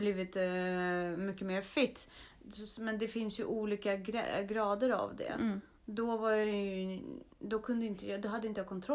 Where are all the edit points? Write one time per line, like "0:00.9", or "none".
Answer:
0:07.3